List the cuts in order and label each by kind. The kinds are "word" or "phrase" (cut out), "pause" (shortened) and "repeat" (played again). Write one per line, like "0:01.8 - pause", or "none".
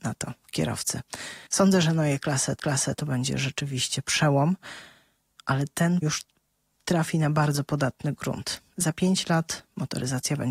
0:01.5 - pause
0:02.6 - repeat
0:06.0 - word